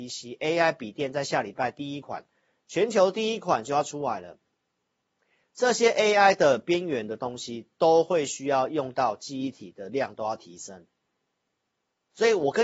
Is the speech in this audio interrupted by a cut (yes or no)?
no